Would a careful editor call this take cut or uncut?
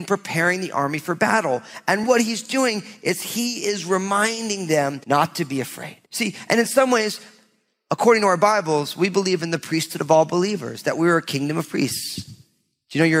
cut